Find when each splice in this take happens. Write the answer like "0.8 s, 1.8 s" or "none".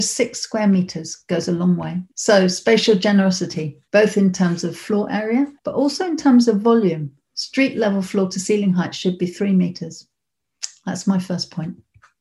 2.1 s, 3.9 s, 5.6 s